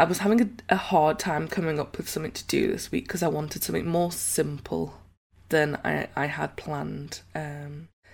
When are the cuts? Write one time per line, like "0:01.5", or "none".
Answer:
none